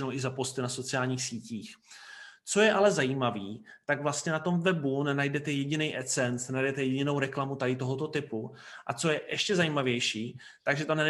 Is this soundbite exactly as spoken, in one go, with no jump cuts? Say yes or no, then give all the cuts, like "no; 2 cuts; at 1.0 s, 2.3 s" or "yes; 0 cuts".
yes; 0 cuts